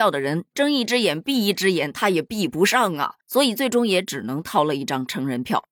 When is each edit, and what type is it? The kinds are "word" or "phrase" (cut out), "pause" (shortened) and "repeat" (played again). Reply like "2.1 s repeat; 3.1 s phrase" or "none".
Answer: 3.2 s pause